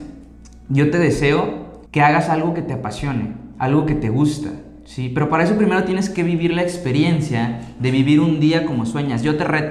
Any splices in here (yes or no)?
yes